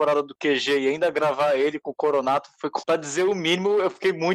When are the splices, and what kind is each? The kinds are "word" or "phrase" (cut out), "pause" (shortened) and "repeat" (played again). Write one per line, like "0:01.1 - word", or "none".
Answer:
0:02.8 - word